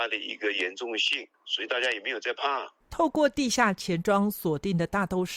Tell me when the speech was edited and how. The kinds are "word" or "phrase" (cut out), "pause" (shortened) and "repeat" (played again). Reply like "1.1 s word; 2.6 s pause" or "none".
1.3 s pause